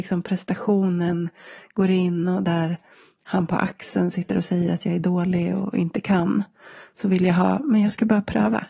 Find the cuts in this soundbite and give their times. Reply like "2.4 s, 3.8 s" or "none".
none